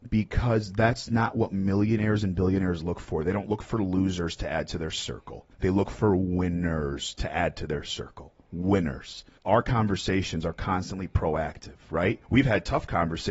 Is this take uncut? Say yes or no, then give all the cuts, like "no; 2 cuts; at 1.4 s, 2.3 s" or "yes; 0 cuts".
no; 3 cuts; at 5.5 s, 9.4 s, 12.2 s